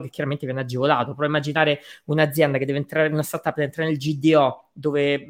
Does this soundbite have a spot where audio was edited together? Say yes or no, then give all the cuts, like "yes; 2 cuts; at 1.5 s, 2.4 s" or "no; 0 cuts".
no; 0 cuts